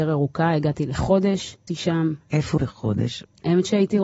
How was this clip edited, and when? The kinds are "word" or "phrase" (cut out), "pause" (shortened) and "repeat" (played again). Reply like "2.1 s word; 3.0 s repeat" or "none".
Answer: 1.7 s word; 2.6 s word